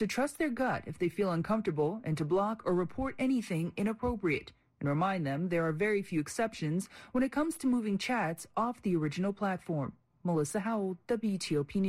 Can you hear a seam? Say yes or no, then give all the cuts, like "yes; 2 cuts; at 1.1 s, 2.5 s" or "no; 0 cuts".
no; 0 cuts